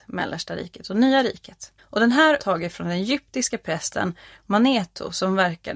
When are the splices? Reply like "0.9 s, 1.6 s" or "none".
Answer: 1.8 s, 2.4 s